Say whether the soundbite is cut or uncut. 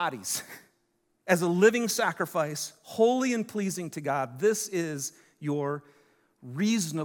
uncut